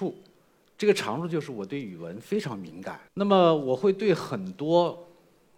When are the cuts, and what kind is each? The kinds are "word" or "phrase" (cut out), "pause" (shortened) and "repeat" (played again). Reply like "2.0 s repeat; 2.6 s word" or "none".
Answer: 3.1 s pause